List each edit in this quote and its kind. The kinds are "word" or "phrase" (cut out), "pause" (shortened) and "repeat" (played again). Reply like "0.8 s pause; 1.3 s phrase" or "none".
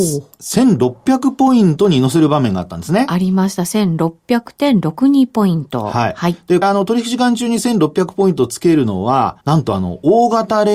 6.6 s phrase; 9.4 s pause